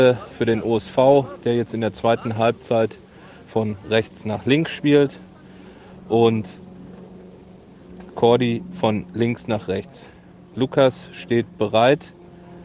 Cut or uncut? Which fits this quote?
uncut